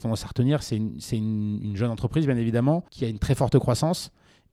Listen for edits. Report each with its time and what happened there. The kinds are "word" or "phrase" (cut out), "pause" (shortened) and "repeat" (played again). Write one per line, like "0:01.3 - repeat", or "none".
0:02.9 - pause